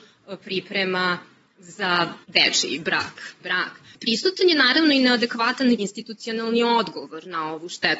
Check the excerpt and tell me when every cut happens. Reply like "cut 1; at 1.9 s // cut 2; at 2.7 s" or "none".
cut 1; at 2.2 s // cut 2; at 3.4 s // cut 3; at 5.8 s